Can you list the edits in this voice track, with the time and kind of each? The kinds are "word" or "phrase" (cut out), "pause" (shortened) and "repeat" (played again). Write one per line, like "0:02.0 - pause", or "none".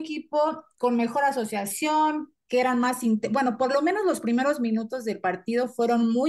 none